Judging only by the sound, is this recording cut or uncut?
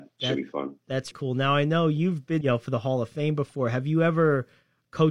cut